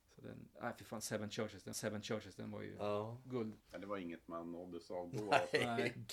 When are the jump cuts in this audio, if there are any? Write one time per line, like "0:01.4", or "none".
0:01.7
0:03.6